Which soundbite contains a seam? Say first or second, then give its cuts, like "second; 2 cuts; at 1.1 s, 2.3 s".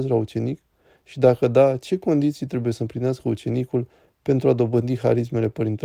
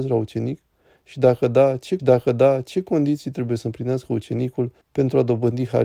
second; 2 cuts; at 2.0 s, 4.8 s